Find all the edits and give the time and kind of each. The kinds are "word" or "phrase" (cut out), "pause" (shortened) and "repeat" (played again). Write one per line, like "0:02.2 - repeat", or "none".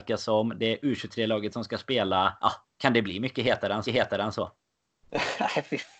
0:02.4 - pause
0:03.9 - repeat

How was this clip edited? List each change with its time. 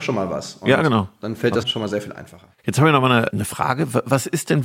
0:01.6 - word
0:02.5 - pause
0:03.3 - word

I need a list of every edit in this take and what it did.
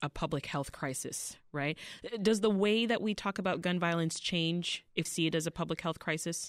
0:05.0 - word

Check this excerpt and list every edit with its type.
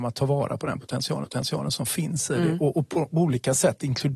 0:01.2 - repeat

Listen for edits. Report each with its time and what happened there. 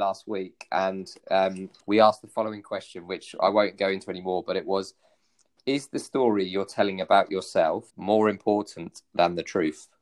0:01.8 - pause
0:07.9 - pause

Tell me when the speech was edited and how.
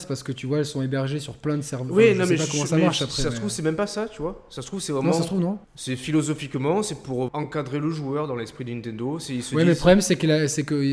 0:05.6 - pause
0:07.3 - word

